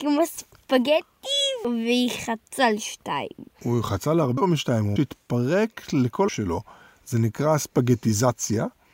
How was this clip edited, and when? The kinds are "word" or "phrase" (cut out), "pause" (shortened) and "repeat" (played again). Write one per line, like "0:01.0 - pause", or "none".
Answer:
0:03.5 - pause
0:04.4 - word
0:05.0 - word
0:06.3 - word